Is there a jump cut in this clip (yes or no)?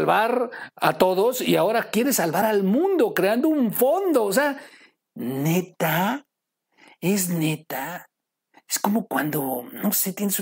no